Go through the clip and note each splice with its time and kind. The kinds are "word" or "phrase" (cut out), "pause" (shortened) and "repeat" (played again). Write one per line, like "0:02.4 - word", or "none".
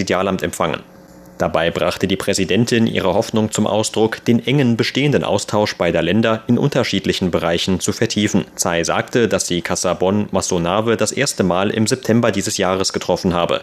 0:08.5 - pause